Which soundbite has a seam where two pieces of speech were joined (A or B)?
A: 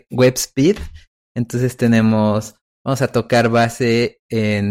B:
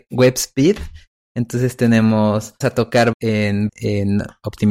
B